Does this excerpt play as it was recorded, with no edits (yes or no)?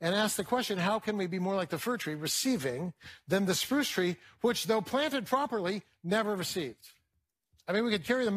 yes